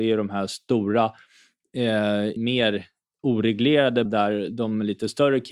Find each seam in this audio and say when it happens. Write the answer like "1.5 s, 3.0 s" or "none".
2.4 s, 4.1 s

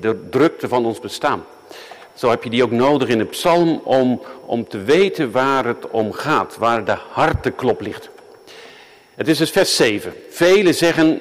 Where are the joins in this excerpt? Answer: none

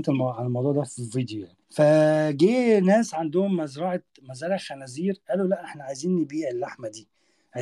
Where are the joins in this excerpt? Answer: 1.6 s

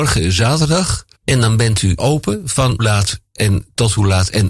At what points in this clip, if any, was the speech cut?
1.1 s, 2.0 s, 2.8 s

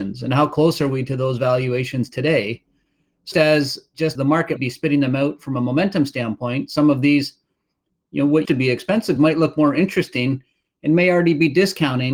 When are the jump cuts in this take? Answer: 3.3 s, 4.1 s, 4.6 s, 8.4 s, 9.2 s

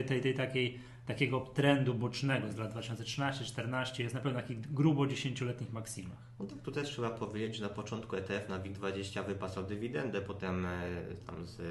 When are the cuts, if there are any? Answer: none

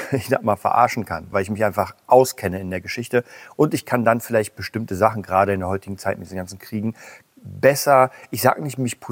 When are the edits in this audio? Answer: 1.3 s, 7.2 s

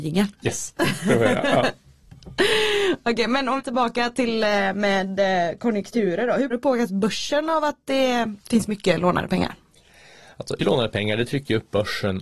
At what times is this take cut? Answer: 3.6 s, 6.5 s, 8.4 s, 10.6 s

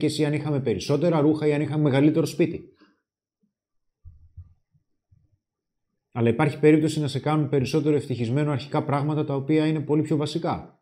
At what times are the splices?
none

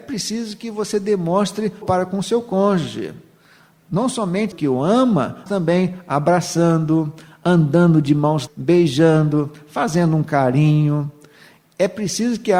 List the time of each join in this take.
1.8 s, 4.5 s, 5.5 s, 8.5 s

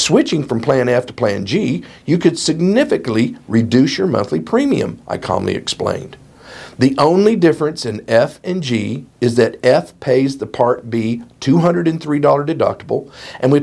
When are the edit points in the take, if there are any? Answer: none

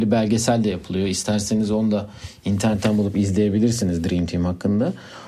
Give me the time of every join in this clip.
none

